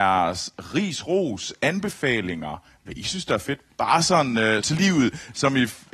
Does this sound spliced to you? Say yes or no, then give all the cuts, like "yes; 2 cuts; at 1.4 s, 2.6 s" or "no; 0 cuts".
yes; 1 cut; at 4.6 s